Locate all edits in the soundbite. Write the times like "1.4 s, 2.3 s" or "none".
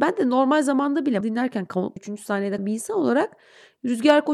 1.2 s, 2.0 s, 2.6 s